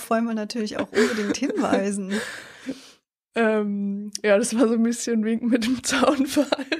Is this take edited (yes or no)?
no